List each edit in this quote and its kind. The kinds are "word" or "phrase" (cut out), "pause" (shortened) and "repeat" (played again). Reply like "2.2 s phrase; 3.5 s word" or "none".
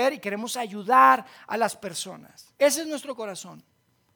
2.5 s pause